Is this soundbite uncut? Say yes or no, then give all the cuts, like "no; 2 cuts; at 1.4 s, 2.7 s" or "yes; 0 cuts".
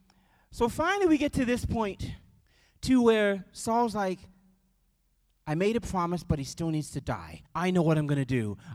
no; 2 cuts; at 2.4 s, 7.5 s